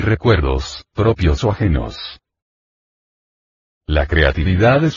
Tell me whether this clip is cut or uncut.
uncut